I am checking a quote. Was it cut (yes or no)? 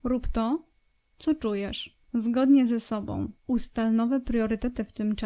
yes